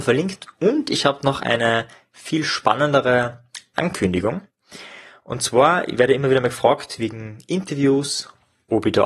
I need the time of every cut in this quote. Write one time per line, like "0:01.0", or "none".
none